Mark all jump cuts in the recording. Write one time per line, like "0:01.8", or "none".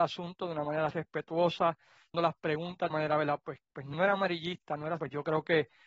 0:02.1
0:02.9
0:03.6
0:03.9
0:05.0